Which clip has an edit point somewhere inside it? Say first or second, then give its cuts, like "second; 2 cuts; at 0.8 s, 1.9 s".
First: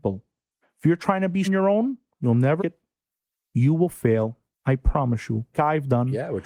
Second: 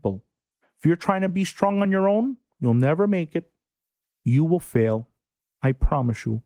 first; 4 cuts; at 1.4 s, 2.6 s, 4.5 s, 5.5 s